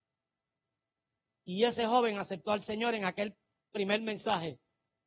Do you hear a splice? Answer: no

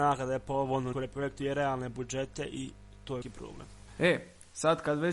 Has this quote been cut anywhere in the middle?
yes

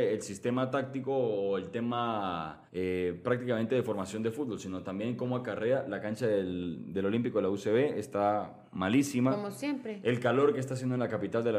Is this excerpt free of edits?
no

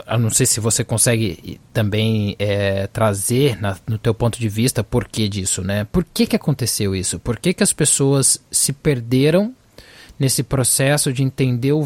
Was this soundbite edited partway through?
no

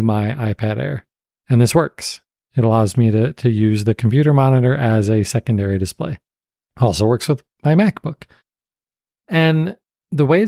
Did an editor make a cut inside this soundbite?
no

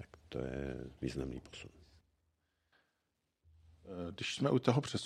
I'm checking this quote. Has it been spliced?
yes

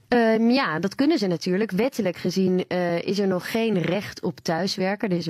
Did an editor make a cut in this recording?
no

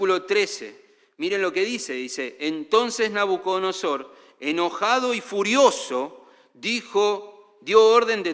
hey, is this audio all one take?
yes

